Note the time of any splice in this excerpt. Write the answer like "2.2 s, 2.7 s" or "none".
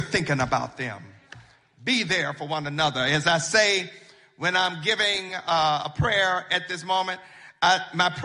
none